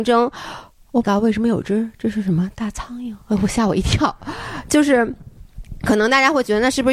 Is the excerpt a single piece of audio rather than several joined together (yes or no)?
no